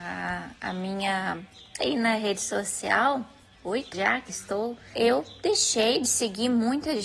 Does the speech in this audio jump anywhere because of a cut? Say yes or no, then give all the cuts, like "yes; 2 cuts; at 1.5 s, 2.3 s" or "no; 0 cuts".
yes; 4 cuts; at 1.8 s, 3.9 s, 4.3 s, 4.9 s